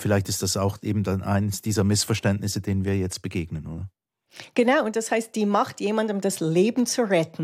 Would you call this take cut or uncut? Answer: uncut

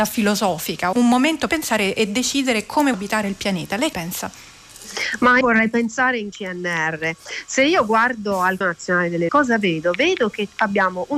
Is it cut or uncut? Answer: cut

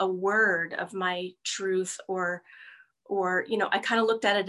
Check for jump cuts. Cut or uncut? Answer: uncut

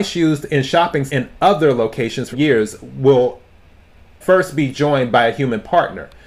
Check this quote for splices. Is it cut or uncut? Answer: cut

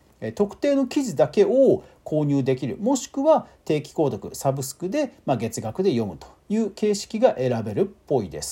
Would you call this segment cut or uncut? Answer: cut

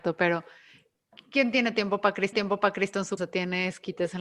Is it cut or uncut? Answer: cut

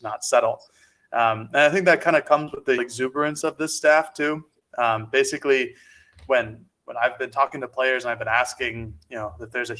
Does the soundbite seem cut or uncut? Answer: cut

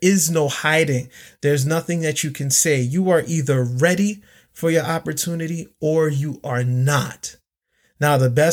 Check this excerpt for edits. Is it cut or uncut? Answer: uncut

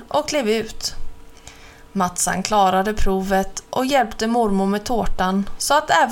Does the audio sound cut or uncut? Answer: uncut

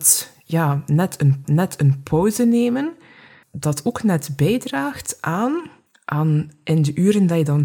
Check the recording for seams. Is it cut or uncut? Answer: cut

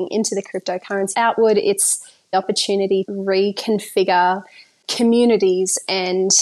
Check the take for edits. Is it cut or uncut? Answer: cut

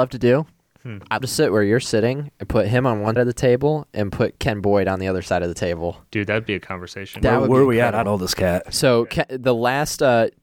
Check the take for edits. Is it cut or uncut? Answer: cut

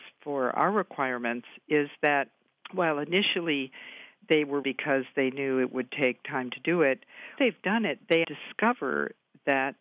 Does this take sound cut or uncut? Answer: cut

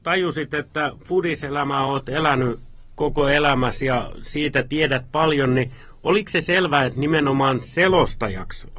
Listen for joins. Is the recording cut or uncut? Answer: uncut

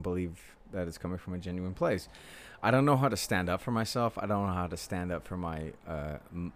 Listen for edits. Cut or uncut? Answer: uncut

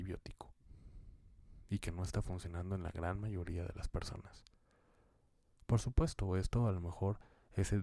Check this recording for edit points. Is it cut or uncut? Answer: uncut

